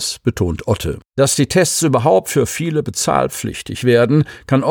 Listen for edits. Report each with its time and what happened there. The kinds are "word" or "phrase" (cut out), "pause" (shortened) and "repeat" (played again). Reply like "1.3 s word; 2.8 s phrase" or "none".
1.1 s pause